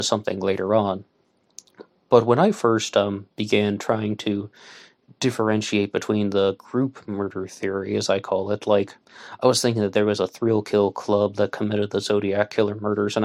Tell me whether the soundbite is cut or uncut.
uncut